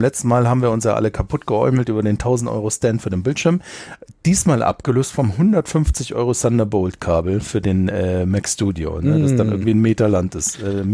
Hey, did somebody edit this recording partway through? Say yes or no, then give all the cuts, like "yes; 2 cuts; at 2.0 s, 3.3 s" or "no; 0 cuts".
no; 0 cuts